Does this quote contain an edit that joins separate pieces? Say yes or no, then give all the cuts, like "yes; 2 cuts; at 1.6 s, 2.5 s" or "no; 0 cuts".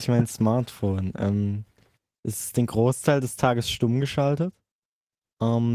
no; 0 cuts